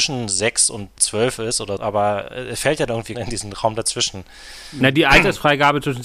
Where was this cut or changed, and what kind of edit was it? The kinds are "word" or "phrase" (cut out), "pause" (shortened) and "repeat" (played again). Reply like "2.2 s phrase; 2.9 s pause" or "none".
1.0 s word; 1.8 s word; 3.1 s phrase